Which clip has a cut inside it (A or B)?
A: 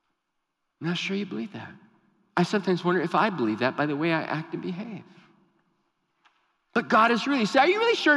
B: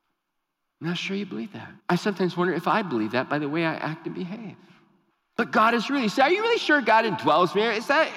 B